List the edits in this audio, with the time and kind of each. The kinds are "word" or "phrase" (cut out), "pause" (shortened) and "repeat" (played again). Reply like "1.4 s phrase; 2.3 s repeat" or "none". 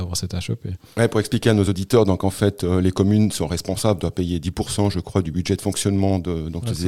none